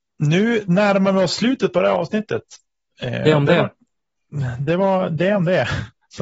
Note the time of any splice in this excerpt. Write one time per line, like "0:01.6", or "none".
none